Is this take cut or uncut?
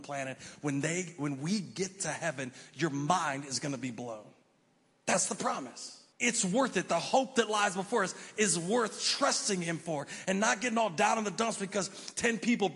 cut